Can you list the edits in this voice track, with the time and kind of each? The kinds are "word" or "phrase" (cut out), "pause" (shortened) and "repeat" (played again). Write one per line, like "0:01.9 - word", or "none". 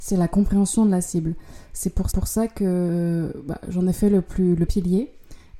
0:02.1 - repeat
0:04.7 - word